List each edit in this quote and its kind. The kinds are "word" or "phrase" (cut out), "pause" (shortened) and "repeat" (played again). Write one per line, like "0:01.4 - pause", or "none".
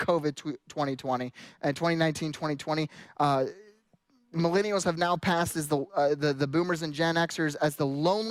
none